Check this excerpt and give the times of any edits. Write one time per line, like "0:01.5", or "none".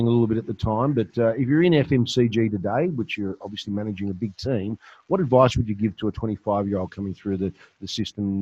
none

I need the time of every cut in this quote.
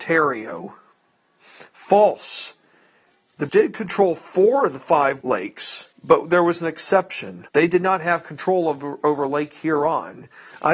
0:01.7
0:03.5
0:05.2
0:05.9
0:07.5

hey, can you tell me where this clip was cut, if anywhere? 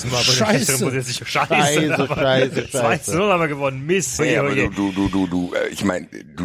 0:04.2

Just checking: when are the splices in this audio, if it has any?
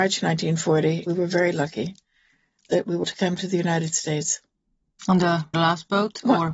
0:01.1
0:03.0
0:05.5

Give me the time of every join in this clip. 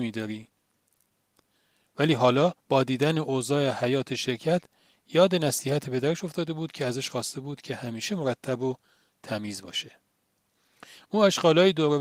0:02.6

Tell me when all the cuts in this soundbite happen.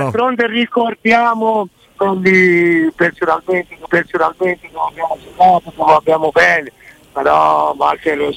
0:02.0
0:03.9
0:06.3

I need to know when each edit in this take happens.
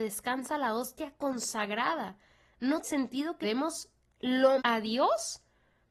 0:02.8
0:03.4
0:04.6

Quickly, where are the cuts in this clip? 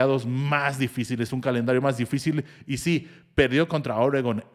none

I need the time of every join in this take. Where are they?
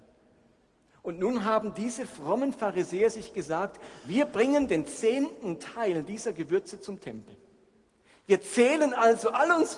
none

